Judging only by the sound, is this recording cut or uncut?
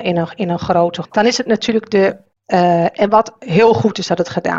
cut